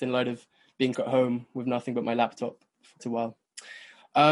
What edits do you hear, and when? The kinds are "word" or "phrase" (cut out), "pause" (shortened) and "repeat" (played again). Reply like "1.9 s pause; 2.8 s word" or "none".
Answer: 0.9 s word; 3.0 s word